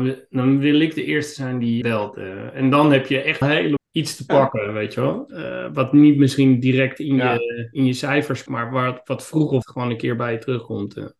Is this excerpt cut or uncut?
cut